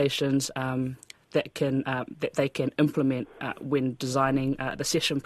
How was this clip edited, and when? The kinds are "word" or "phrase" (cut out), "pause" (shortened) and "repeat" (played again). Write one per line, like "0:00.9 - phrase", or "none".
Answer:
none